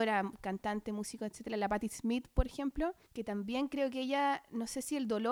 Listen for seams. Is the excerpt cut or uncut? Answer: cut